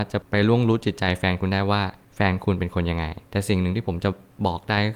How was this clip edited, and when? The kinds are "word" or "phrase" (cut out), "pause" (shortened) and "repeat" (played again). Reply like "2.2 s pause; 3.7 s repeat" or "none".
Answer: 3.2 s pause

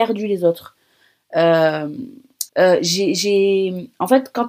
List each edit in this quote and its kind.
2.5 s phrase

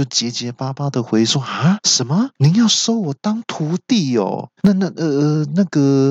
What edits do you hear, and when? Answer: 2.4 s pause; 4.6 s pause

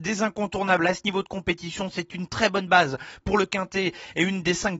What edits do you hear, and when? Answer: none

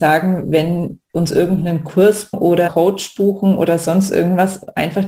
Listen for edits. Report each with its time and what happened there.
1.1 s word; 2.3 s word; 2.7 s word

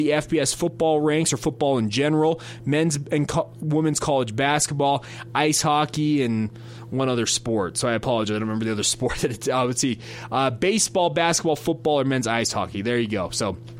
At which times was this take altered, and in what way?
none

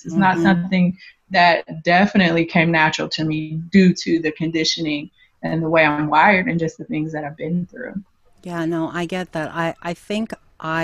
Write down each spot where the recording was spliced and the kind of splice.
none

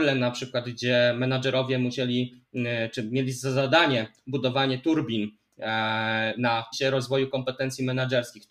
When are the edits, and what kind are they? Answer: 6.7 s phrase

